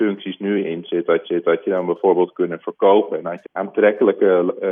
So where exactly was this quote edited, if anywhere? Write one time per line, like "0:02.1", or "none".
0:01.2
0:03.4